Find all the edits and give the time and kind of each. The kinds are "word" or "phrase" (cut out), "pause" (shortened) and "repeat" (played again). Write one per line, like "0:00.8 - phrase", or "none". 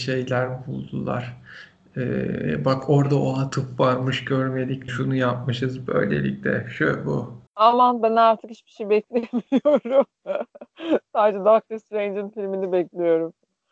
0:04.9 - word
0:07.5 - pause
0:10.2 - pause

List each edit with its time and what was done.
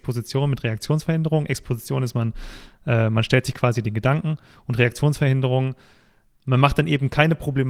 none

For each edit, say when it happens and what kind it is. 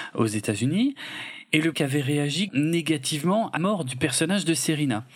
0:01.7 - word
0:02.5 - word
0:03.6 - word

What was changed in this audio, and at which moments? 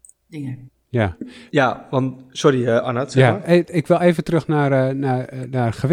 0:01.5 - pause

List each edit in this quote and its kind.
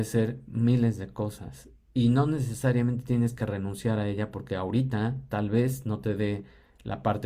none

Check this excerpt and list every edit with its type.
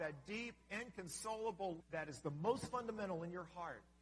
0:01.8 - phrase

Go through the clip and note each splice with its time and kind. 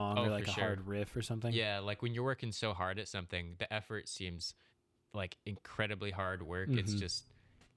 0:04.7 - pause

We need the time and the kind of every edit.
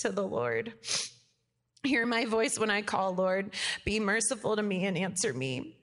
none

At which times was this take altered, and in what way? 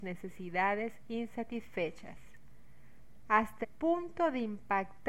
0:03.6 - word

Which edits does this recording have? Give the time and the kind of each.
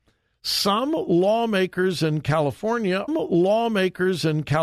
0:03.1 - repeat

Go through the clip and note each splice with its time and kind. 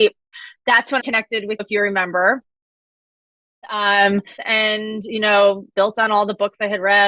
0:01.0 - word
0:01.6 - word
0:04.4 - phrase
0:05.7 - word

